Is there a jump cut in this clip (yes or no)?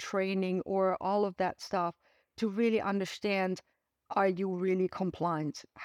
no